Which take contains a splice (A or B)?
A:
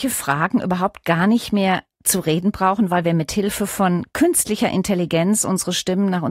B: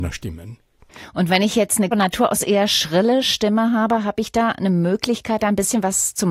B